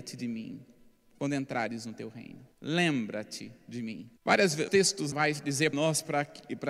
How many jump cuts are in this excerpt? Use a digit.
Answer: 5